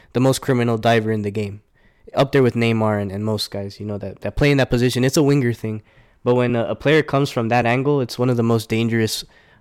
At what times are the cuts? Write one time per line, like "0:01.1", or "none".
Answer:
none